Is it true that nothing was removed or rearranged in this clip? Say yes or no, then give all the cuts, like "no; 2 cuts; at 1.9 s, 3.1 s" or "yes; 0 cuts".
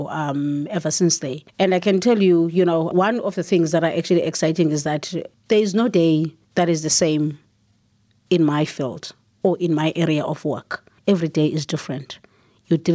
no; 3 cuts; at 1.5 s, 6.4 s, 11.0 s